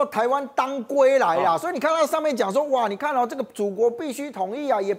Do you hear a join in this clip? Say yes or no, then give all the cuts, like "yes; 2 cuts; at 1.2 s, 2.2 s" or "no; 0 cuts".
no; 0 cuts